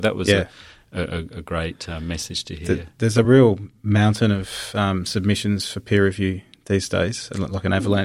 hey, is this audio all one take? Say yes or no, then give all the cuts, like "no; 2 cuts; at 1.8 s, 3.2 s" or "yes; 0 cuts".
yes; 0 cuts